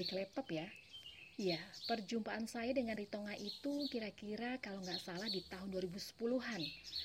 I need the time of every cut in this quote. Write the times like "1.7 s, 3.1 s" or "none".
3.0 s